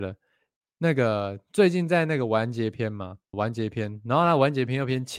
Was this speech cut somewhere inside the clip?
yes; 1 cut; at 3.3 s

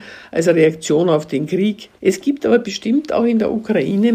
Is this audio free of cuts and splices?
no; 1 cut; at 2.0 s

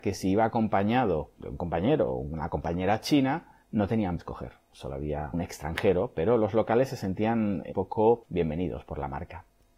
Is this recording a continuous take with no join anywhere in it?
no; 4 cuts; at 3.6 s, 4.2 s, 5.3 s, 7.7 s

